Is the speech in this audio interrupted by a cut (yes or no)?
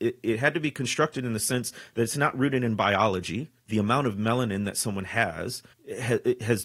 yes